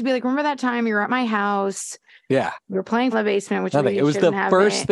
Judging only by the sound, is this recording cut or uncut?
cut